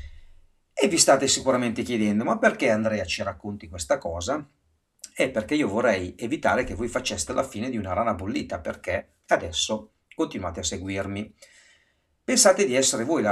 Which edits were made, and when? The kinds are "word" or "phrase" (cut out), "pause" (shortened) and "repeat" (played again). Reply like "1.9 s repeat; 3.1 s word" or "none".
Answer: none